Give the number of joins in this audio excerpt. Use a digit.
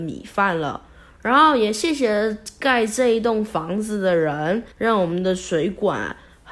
1